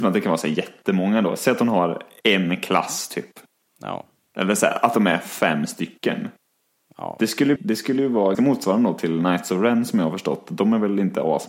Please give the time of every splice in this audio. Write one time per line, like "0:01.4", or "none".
0:07.6
0:08.3